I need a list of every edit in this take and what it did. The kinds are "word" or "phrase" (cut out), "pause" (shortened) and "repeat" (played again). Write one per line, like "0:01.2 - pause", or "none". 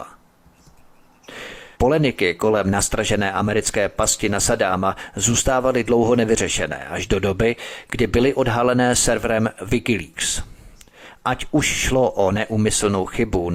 0:01.7 - pause